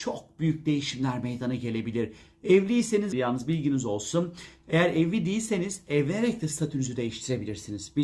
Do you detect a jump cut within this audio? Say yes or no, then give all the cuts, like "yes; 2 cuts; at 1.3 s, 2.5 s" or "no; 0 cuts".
yes; 1 cut; at 3.1 s